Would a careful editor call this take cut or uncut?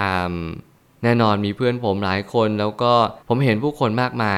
cut